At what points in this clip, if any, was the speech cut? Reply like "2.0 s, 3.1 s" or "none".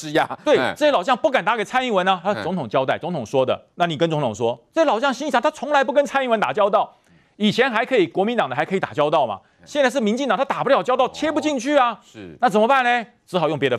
3.7 s, 4.7 s